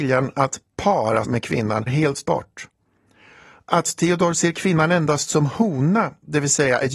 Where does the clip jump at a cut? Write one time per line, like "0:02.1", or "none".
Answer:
0:01.2
0:01.9
0:02.3

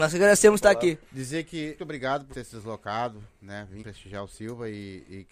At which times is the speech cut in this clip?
0:01.0
0:01.8
0:02.3
0:03.8

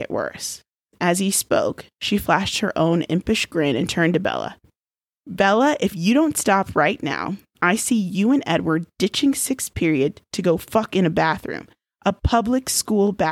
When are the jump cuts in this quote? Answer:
none

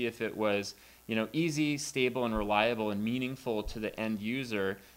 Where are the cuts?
none

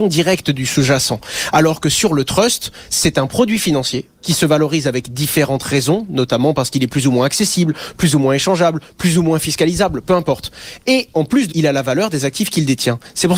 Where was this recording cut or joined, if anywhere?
0:04.1
0:11.5

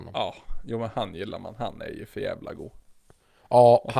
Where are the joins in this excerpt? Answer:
none

